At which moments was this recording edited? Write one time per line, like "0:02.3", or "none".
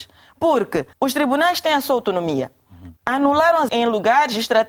0:00.9
0:03.0
0:03.7